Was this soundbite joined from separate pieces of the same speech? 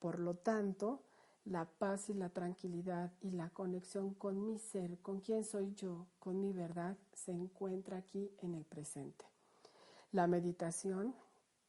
no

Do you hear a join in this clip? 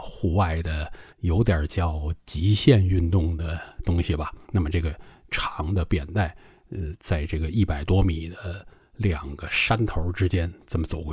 yes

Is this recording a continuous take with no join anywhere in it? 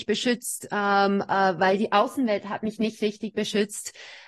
yes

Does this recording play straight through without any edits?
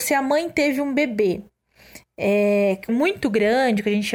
no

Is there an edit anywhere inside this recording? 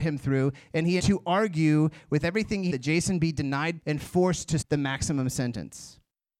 yes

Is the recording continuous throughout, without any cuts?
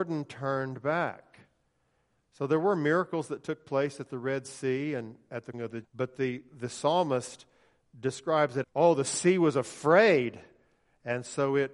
no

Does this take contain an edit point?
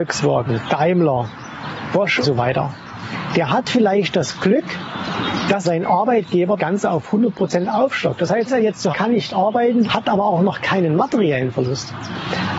yes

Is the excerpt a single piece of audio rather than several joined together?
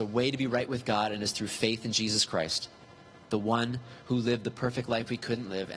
yes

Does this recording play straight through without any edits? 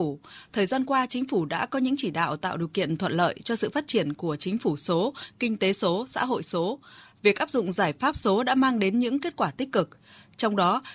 yes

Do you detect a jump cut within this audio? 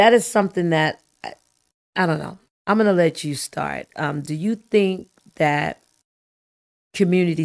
no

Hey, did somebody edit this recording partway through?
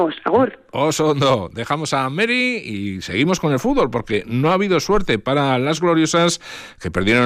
no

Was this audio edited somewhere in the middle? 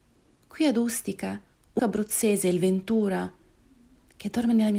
yes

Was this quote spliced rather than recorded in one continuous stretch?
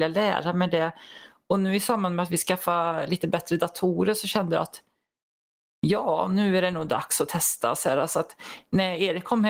no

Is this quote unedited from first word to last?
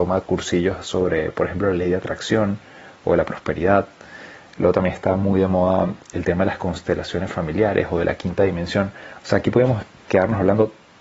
yes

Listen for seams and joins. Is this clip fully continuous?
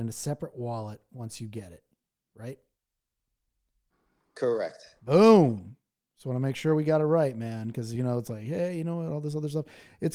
yes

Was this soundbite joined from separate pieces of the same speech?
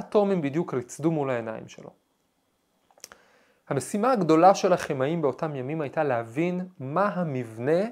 no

